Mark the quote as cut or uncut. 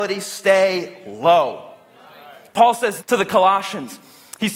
cut